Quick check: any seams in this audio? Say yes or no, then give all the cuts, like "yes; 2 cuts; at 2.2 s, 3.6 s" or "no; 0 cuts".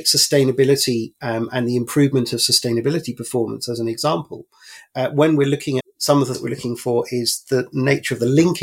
yes; 2 cuts; at 5.8 s, 6.3 s